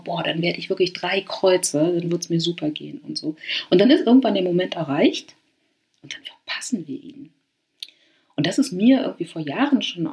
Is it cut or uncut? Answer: uncut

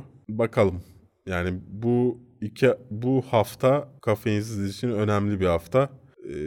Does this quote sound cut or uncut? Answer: cut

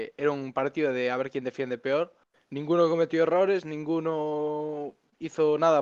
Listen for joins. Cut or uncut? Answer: cut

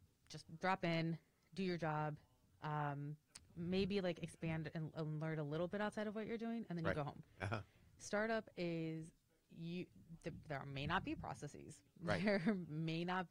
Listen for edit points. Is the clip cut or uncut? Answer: uncut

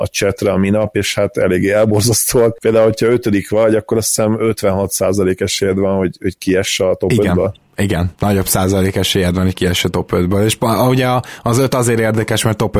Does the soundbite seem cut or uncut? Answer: cut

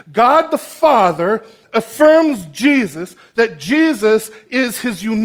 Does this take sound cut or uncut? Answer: uncut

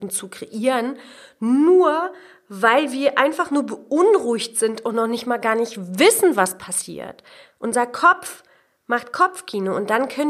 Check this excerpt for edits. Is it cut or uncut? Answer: uncut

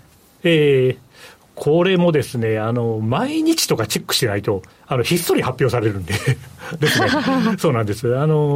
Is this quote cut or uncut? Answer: cut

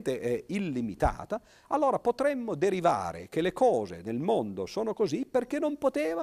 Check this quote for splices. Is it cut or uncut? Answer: uncut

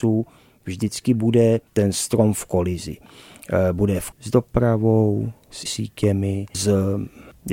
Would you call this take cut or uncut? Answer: cut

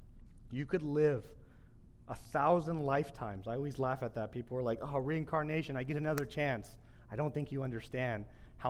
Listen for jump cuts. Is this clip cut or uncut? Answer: uncut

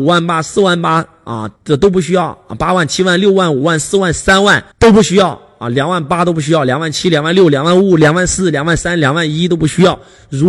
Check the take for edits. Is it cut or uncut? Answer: cut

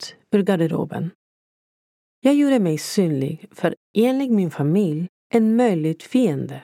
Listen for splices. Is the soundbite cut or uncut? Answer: uncut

